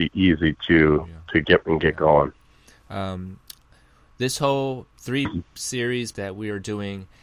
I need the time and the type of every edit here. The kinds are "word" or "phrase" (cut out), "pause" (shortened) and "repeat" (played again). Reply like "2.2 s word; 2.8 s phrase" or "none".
1.6 s word; 6.1 s word